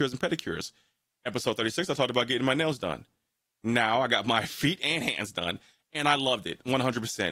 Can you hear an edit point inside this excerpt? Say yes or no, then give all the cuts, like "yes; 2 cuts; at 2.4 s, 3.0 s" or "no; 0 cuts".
no; 0 cuts